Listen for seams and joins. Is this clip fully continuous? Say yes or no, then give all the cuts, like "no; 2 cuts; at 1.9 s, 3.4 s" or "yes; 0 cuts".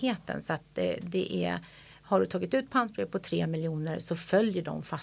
yes; 0 cuts